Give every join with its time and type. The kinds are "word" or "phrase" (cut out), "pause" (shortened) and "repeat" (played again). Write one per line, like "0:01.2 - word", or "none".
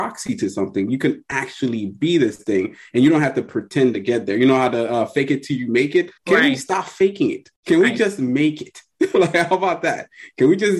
0:06.2 - pause
0:07.6 - pause